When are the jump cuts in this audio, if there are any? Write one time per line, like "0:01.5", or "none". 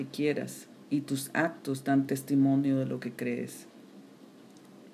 none

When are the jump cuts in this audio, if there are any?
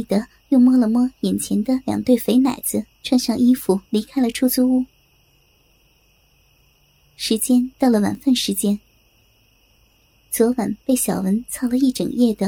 0:02.9
0:03.9

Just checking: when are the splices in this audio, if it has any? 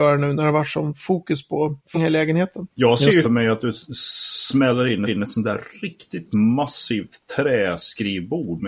0:01.9
0:03.2
0:05.1
0:06.3

